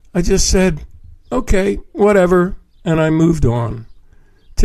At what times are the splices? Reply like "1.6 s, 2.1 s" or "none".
none